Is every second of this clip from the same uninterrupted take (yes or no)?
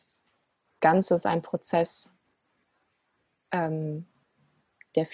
yes